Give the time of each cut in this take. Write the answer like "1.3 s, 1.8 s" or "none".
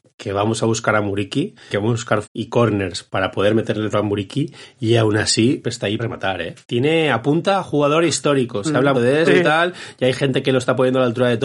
1.7 s, 2.2 s, 3.9 s, 5.6 s, 6.0 s, 6.6 s, 8.9 s, 9.2 s